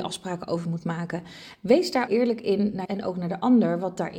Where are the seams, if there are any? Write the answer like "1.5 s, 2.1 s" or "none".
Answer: 2.1 s, 2.8 s